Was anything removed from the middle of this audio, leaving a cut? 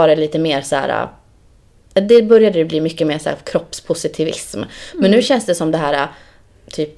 no; 0 cuts

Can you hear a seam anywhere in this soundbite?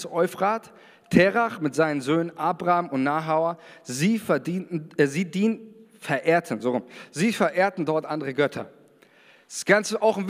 no; 0 cuts

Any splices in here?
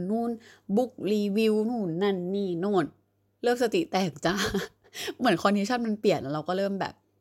no; 0 cuts

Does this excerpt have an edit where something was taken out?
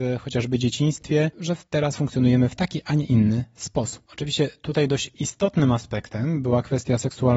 no; 0 cuts

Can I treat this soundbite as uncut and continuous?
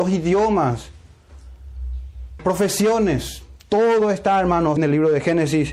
no; 2 cuts; at 2.4 s, 4.8 s

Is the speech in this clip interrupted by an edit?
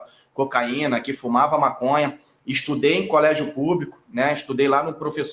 no; 0 cuts

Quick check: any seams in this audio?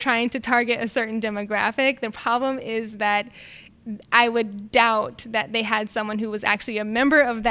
no; 0 cuts

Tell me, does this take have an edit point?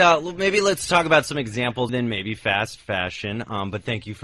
yes; 1 cut; at 1.9 s

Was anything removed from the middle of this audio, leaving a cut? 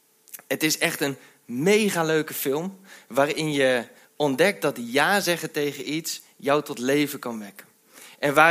no; 0 cuts

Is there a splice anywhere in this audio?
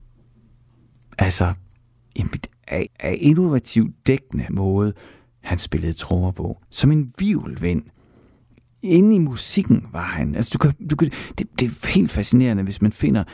yes; 3 cuts; at 2.9 s, 4.5 s, 6.6 s

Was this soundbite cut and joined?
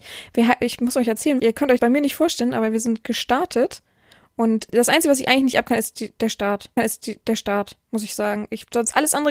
yes; 4 cuts; at 1.4 s, 1.8 s, 4.7 s, 6.8 s

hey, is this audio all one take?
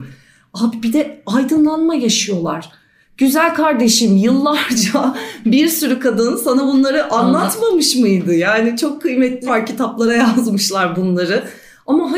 no; 1 cut; at 9.5 s

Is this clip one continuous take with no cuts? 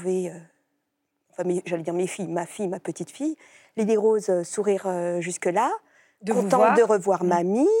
yes; 0 cuts

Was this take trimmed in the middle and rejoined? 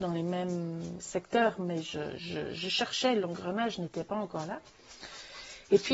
no; 0 cuts

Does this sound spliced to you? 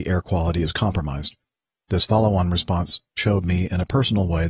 no; 0 cuts

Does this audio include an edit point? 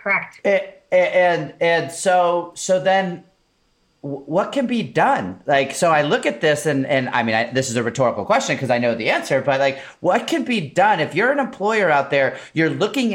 no; 0 cuts

